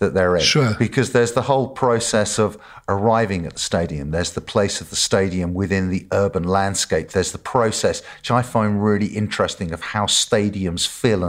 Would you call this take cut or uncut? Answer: uncut